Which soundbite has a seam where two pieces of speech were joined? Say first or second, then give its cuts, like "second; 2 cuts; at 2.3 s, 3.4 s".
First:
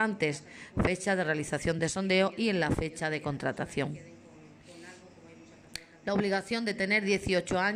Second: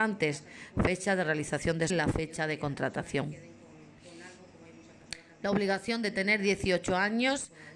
second; 1 cut; at 1.9 s